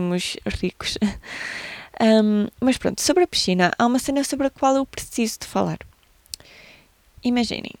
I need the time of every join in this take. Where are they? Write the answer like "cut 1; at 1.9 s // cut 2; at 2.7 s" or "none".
none